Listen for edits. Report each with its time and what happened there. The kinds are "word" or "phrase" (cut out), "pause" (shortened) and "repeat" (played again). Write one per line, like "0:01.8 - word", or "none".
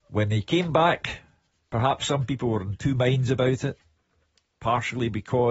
none